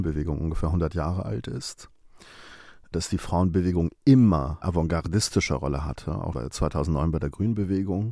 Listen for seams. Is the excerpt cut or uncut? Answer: cut